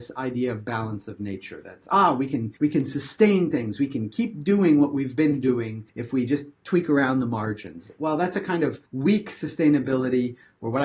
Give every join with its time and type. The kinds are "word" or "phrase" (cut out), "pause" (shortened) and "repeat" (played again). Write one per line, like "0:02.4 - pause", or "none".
0:02.6 - pause
0:05.9 - pause
0:08.9 - pause